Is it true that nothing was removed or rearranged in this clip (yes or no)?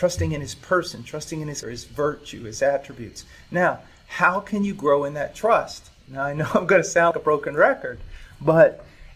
no